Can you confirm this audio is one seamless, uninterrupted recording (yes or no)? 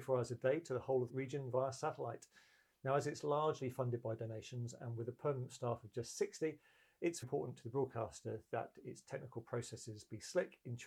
no